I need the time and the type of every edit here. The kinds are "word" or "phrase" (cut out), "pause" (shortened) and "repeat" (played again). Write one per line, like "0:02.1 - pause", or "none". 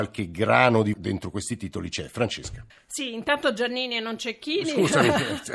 0:00.9 - word
0:02.7 - pause